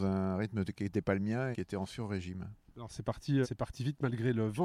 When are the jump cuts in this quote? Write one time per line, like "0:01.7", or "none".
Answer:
0:01.5
0:02.7
0:03.4